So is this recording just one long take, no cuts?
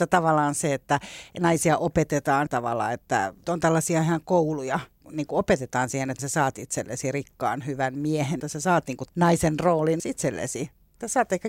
no; 6 cuts; at 2.5 s, 4.9 s, 6.2 s, 8.4 s, 9.1 s, 10.0 s

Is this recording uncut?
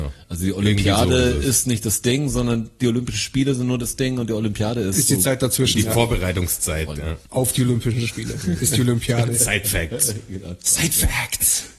no; 1 cut; at 7.3 s

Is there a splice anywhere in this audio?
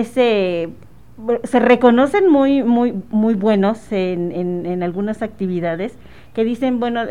no; 0 cuts

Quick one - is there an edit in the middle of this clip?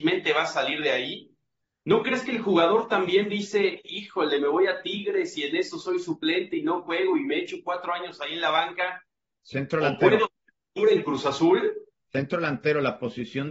no; 0 cuts

